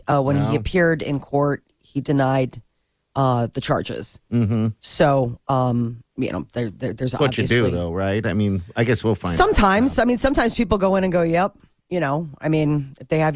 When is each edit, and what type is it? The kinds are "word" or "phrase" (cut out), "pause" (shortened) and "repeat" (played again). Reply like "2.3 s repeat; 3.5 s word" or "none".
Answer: 6.1 s pause